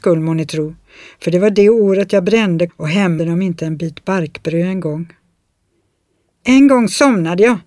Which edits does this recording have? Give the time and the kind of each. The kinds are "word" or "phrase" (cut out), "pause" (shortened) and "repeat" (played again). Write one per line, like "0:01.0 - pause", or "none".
0:02.7 - word
0:03.2 - word